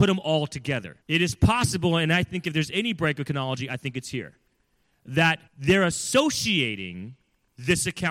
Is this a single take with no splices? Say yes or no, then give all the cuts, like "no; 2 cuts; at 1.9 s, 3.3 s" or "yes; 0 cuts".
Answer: no; 2 cuts; at 1.0 s, 5.5 s